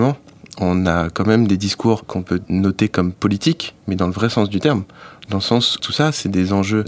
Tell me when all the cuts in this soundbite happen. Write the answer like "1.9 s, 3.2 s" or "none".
3.8 s, 5.8 s